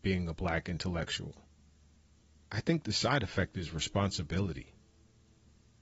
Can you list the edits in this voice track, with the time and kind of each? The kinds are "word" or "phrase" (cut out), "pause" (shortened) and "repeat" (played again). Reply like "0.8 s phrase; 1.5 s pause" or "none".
none